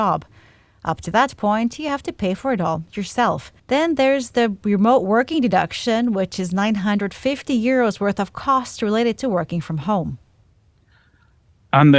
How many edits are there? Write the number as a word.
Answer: one